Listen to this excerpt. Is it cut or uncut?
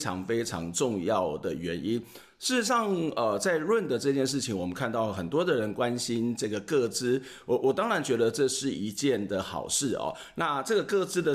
uncut